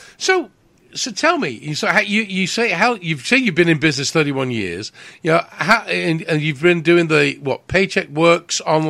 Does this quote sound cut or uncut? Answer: uncut